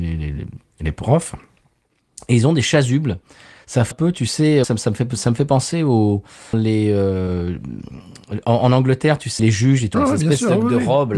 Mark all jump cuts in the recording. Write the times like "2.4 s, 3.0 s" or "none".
3.9 s, 4.6 s, 6.5 s, 9.4 s, 9.9 s